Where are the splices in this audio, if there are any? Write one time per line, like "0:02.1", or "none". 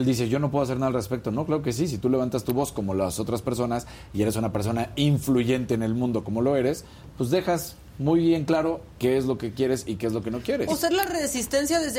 none